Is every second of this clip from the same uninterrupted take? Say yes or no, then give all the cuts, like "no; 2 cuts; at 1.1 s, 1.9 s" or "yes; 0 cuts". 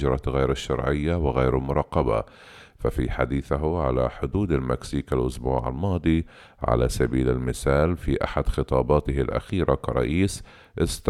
yes; 0 cuts